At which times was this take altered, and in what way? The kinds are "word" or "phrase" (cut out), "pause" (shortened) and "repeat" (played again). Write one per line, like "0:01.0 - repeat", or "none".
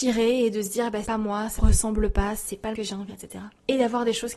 0:01.0 - word
0:01.6 - word
0:02.7 - word
0:03.1 - word